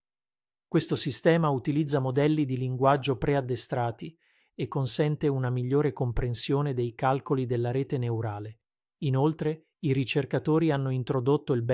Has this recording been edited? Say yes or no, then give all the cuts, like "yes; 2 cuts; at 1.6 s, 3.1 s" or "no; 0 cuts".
no; 0 cuts